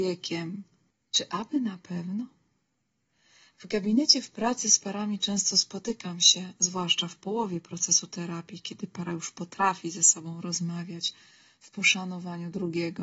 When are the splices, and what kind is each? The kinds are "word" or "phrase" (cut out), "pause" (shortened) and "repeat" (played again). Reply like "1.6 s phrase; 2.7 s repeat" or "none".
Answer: none